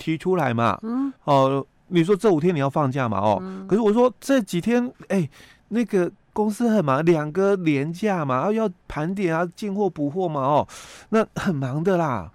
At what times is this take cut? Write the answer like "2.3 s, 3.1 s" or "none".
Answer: 1.2 s, 4.9 s, 8.8 s